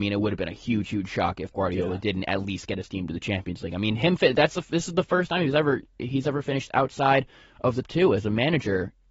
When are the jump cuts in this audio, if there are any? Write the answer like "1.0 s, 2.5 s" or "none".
1.5 s, 7.8 s